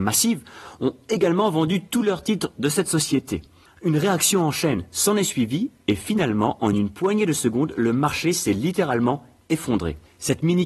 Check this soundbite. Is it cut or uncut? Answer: uncut